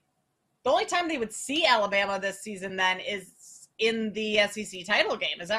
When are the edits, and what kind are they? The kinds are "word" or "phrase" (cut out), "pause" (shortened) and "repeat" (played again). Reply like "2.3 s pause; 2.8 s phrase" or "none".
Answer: none

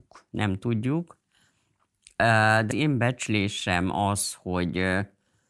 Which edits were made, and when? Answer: 2.7 s word

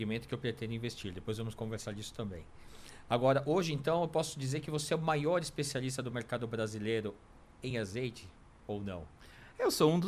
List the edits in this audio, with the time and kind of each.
none

